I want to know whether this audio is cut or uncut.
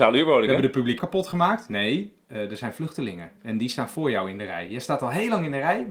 cut